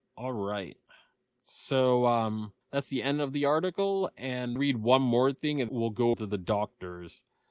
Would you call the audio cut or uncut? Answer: cut